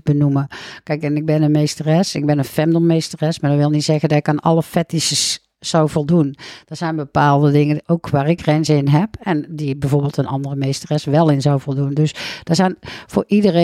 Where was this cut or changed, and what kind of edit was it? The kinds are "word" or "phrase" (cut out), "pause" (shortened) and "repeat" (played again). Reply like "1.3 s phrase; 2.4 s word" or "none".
8.4 s word